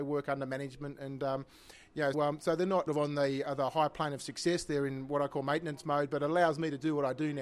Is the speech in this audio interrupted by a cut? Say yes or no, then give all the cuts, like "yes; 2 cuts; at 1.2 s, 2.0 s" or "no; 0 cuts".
yes; 2 cuts; at 2.1 s, 2.9 s